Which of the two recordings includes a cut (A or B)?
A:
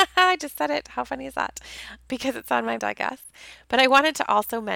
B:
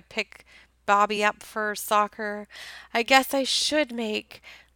A